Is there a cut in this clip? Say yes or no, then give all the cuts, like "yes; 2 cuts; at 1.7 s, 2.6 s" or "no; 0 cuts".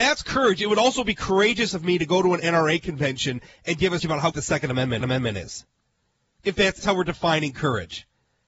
yes; 4 cuts; at 4.0 s, 4.3 s, 5.0 s, 6.8 s